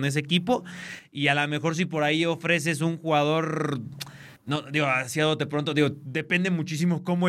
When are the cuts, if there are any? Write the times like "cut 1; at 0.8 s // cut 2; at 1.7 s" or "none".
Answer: cut 1; at 4.4 s